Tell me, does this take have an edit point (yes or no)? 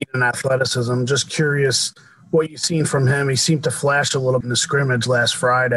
yes